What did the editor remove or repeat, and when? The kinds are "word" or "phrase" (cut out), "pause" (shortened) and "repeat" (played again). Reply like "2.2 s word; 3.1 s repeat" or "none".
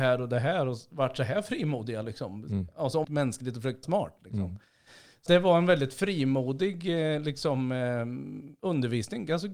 3.0 s phrase; 3.8 s word; 5.3 s word